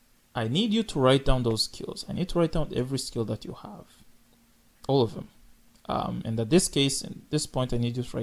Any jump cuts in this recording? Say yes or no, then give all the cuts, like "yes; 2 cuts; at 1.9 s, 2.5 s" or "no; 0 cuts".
no; 0 cuts